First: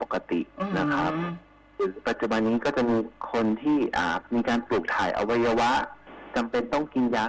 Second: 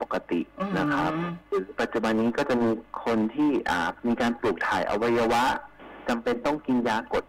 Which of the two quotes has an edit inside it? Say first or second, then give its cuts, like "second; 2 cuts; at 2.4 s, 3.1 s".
second; 1 cut; at 1.4 s